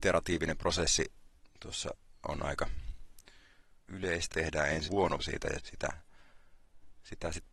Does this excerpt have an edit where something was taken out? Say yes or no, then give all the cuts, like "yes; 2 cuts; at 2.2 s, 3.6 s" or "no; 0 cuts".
yes; 6 cuts; at 2.2 s, 3.9 s, 4.3 s, 4.9 s, 5.2 s, 5.6 s